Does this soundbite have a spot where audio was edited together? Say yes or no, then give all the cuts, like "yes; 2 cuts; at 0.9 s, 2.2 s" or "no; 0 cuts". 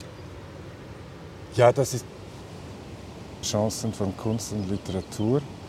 yes; 1 cut; at 3.4 s